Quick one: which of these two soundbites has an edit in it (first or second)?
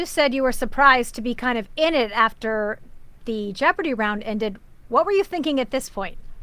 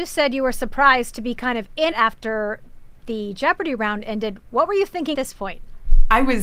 second